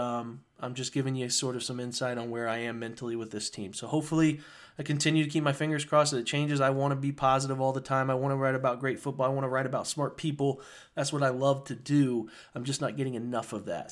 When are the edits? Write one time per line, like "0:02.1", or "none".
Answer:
none